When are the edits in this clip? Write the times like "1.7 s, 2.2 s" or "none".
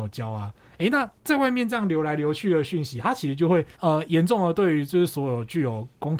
1.2 s, 3.7 s